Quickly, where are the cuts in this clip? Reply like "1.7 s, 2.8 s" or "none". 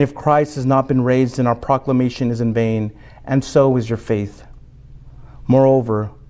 none